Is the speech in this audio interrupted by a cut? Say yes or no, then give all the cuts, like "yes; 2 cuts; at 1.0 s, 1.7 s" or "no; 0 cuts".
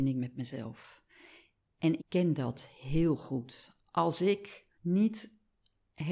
yes; 2 cuts; at 2.0 s, 4.7 s